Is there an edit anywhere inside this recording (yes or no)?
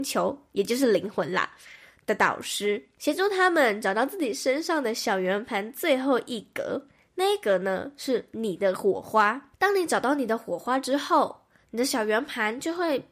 no